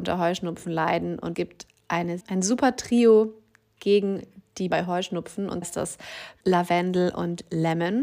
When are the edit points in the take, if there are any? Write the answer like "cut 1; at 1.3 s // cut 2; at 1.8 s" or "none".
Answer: cut 1; at 1.3 s // cut 2; at 2.2 s // cut 3; at 4.7 s // cut 4; at 5.6 s // cut 5; at 6.4 s